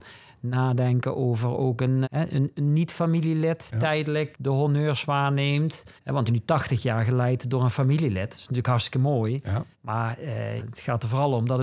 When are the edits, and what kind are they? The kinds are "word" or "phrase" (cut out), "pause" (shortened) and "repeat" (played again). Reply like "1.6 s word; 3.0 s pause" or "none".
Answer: 2.0 s word; 3.7 s word; 4.3 s word; 6.0 s pause; 6.3 s word; 9.7 s pause; 10.6 s word